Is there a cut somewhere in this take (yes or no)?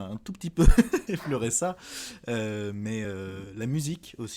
no